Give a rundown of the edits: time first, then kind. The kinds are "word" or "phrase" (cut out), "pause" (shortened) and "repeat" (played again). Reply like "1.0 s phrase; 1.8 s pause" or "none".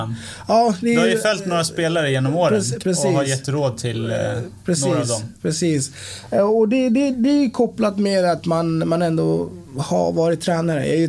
2.8 s phrase; 7.1 s word